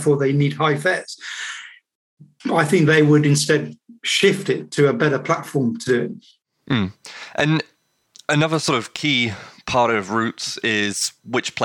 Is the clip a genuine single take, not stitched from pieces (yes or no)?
yes